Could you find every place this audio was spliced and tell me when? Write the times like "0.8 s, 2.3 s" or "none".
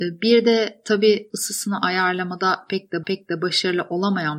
1.3 s, 3.0 s